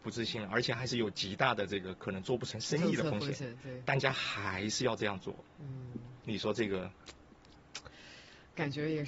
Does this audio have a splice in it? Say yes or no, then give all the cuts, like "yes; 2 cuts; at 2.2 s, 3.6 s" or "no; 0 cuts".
yes; 1 cut; at 6.2 s